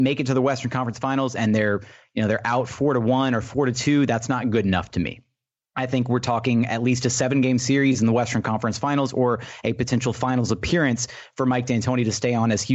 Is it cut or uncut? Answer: uncut